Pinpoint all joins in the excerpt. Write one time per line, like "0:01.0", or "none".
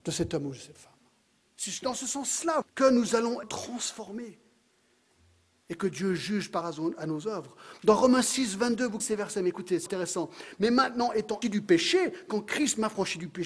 0:02.6
0:03.4
0:06.6
0:09.0
0:09.9
0:11.4

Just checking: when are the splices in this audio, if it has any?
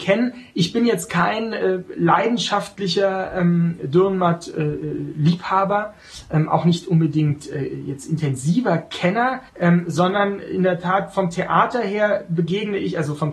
0:09.5

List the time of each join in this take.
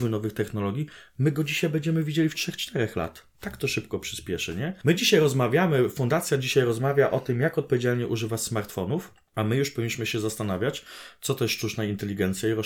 0:02.3

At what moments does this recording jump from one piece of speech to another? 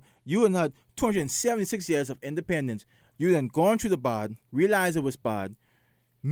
0:04.4

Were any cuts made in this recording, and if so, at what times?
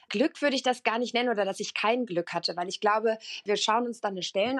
none

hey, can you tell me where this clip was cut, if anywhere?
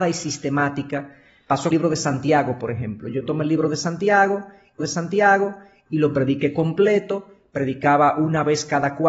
0:01.7
0:04.8

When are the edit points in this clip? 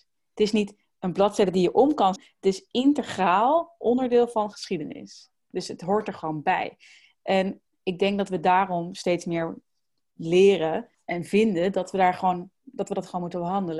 0:02.2
0:07.7
0:10.9

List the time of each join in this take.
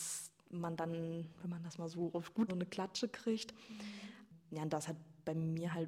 0:02.5

